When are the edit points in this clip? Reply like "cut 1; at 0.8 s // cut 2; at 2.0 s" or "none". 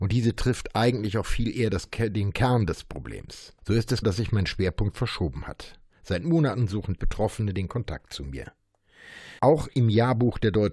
cut 1; at 3.6 s // cut 2; at 4.0 s // cut 3; at 7.0 s // cut 4; at 9.4 s